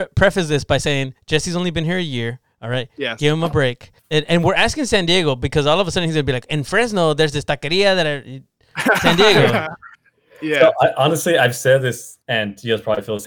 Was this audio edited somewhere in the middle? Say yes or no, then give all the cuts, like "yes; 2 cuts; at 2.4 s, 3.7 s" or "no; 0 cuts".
yes; 3 cuts; at 4.0 s, 9.9 s, 12.2 s